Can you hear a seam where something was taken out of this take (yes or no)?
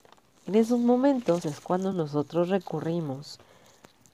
no